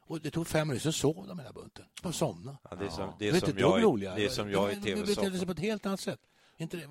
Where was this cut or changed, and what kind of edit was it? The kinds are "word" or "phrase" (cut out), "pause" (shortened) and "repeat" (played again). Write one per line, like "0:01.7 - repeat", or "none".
none